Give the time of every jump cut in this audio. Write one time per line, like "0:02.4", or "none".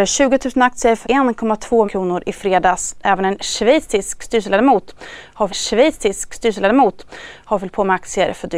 0:01.0
0:01.8
0:05.5